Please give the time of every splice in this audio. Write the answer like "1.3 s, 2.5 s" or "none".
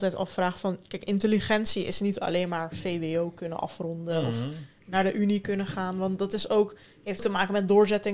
7.2 s